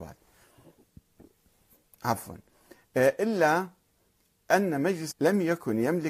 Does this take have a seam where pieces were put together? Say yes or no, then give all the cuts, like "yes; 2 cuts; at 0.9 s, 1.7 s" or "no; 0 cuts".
yes; 1 cut; at 5.1 s